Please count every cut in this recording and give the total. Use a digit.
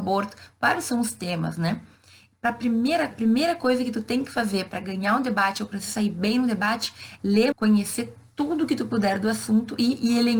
4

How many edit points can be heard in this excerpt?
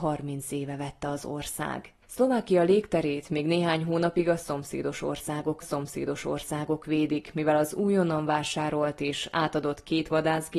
2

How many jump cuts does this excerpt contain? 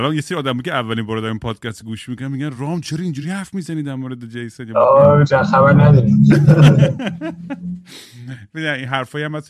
0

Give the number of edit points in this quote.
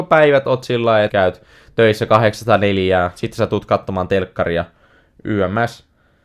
1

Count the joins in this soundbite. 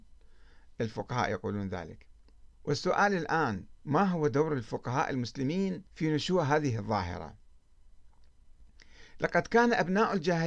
3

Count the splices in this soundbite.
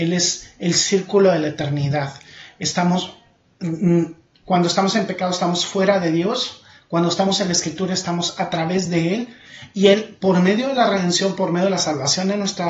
0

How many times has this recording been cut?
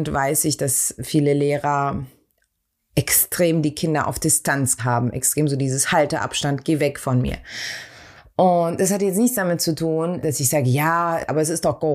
1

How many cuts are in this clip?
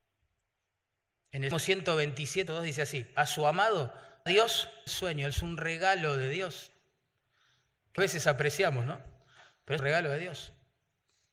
7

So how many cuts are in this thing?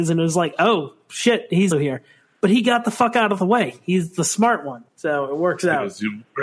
2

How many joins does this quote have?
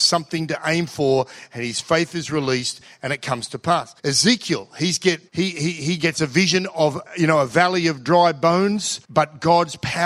4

